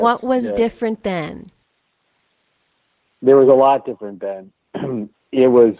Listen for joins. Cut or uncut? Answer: uncut